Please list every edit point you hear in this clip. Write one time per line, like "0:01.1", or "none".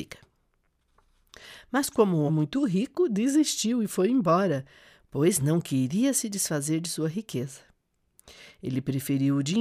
0:02.3